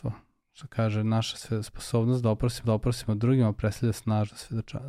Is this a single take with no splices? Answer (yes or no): no